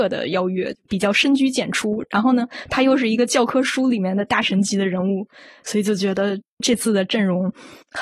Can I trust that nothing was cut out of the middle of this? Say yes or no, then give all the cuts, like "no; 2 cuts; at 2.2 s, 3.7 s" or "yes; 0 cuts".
yes; 0 cuts